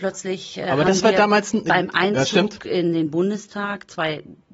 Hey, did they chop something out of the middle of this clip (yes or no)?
no